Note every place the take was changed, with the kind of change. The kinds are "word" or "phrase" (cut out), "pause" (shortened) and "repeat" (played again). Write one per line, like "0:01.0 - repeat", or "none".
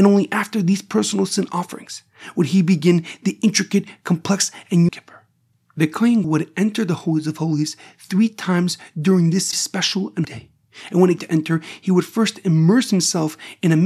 0:04.9 - phrase
0:05.5 - pause
0:06.2 - word
0:09.5 - word
0:10.2 - word
0:11.2 - phrase